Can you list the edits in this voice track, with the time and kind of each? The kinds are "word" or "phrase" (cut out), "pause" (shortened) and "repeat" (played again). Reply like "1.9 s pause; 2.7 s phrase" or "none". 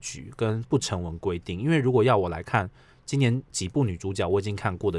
none

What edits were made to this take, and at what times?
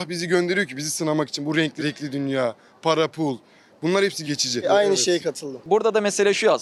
1.8 s word; 4.2 s word

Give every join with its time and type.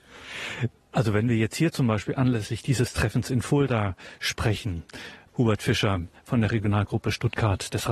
none

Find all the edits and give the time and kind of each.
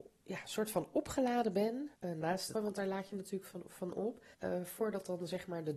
2.0 s pause; 2.5 s word; 4.3 s pause

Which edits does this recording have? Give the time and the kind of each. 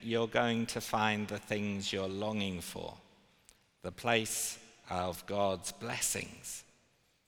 none

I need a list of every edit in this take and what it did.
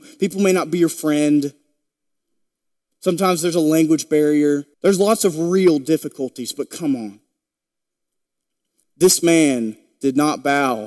4.7 s pause

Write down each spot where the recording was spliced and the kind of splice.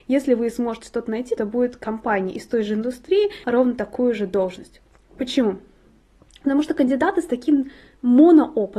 1.4 s word; 3.4 s word

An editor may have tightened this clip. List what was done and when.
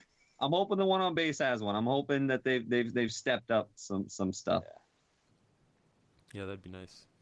none

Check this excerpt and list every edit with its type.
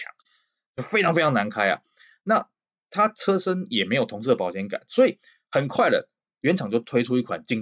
none

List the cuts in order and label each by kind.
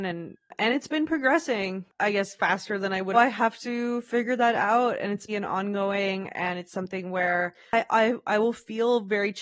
3.1 s phrase; 5.3 s word

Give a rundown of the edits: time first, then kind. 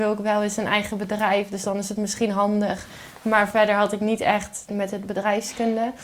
4.7 s phrase

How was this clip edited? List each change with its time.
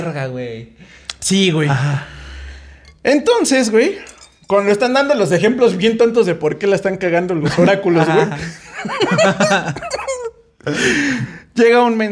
none

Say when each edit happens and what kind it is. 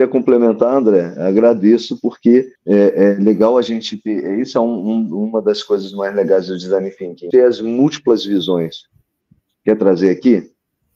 2.6 s pause; 7.3 s phrase

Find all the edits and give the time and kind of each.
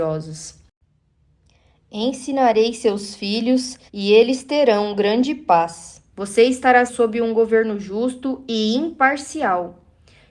3.9 s pause; 6.1 s pause; 6.9 s word

